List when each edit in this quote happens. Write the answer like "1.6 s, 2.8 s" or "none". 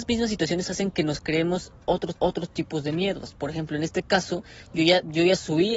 2.1 s

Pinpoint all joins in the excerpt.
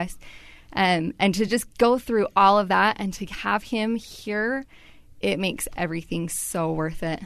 none

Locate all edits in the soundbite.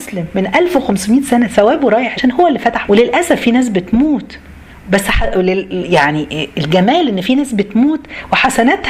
2.2 s, 2.9 s

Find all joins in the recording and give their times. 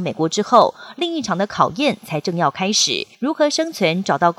3.1 s

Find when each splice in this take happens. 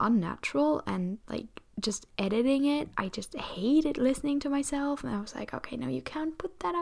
none

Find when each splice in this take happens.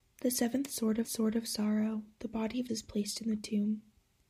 1.0 s, 2.7 s

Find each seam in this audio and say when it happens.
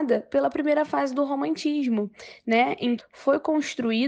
3.0 s

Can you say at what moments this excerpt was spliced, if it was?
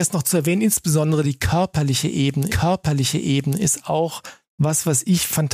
2.5 s

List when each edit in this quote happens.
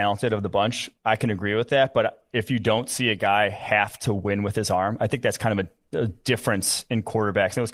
1.0 s

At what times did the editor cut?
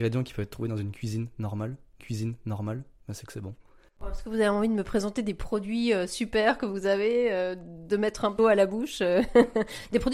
2.0 s, 8.4 s

